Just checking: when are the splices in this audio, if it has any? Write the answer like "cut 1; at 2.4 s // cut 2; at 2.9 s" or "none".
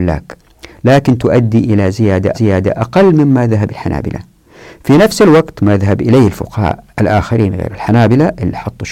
cut 1; at 2.3 s // cut 2; at 3.7 s // cut 3; at 6.9 s